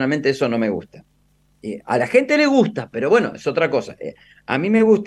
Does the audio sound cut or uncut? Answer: uncut